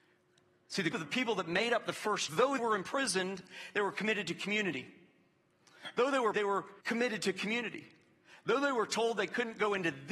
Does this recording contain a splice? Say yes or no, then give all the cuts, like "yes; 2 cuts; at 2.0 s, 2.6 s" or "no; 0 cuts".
yes; 5 cuts; at 0.9 s, 2.3 s, 2.6 s, 6.3 s, 6.8 s